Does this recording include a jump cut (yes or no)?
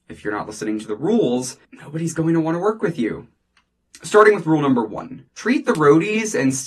yes